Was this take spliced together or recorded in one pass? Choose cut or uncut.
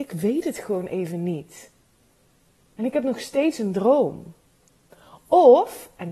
uncut